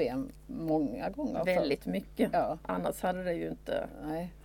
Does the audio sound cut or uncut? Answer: uncut